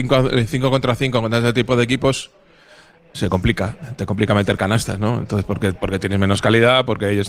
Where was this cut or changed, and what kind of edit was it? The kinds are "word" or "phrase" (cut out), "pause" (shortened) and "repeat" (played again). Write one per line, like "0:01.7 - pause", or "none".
0:03.1 - word